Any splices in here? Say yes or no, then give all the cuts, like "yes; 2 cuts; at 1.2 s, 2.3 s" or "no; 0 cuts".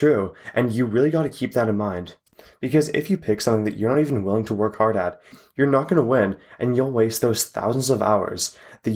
no; 0 cuts